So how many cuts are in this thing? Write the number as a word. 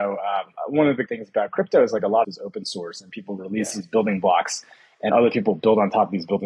three